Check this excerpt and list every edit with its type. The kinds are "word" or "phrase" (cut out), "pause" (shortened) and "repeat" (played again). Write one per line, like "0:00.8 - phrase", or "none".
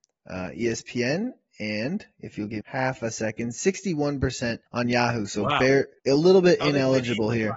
0:02.6 - word
0:04.7 - pause
0:06.0 - pause